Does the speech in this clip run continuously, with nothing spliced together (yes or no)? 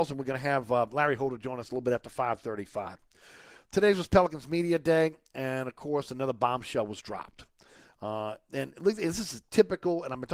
yes